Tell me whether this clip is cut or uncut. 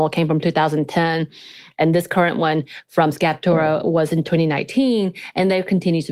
uncut